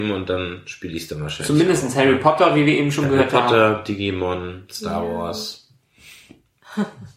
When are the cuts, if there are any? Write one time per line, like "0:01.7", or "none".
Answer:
none